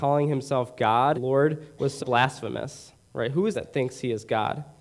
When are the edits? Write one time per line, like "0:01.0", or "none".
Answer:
0:01.1
0:02.0
0:03.5

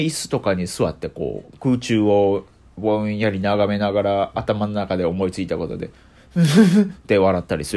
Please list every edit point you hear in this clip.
none

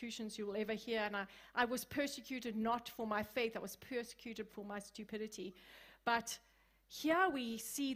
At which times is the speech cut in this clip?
0:04.5

